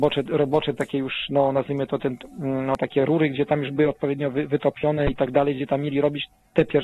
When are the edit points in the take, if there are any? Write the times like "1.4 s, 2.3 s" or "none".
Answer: none